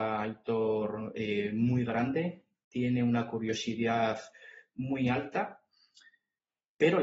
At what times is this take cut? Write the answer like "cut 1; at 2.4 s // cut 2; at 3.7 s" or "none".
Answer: none